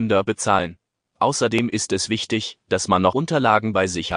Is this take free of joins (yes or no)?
no